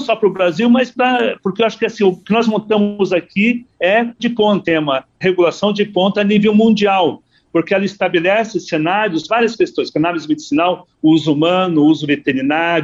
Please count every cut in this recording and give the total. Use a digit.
4